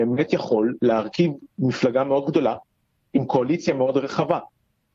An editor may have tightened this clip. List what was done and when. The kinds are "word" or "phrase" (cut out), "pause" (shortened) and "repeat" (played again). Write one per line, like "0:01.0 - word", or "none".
none